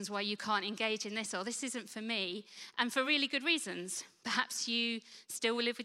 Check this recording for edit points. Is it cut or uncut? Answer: uncut